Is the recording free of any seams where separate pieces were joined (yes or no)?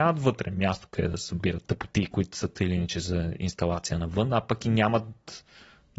no